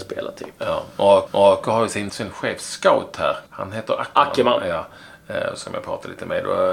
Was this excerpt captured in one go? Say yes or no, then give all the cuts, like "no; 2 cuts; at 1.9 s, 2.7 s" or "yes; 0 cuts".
no; 3 cuts; at 1.3 s, 2.1 s, 3.5 s